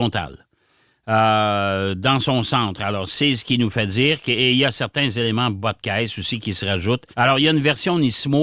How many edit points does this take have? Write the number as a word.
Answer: one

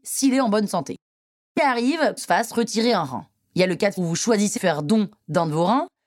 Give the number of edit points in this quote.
four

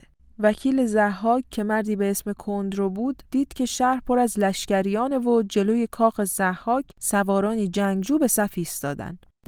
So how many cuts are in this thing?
one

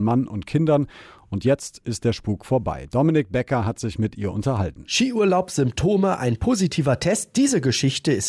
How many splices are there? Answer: zero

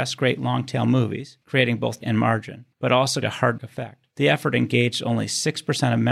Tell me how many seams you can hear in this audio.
six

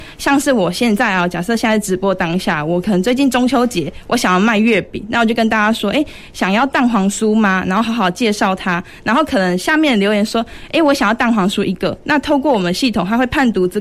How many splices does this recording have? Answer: zero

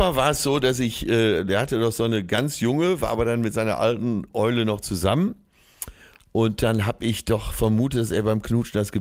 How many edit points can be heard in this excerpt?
zero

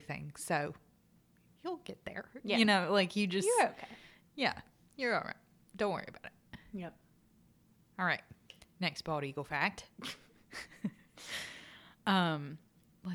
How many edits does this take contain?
zero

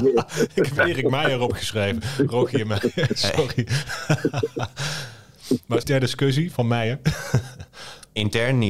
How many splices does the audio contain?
two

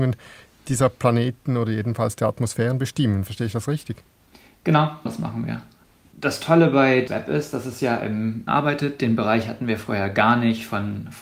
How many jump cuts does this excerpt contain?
three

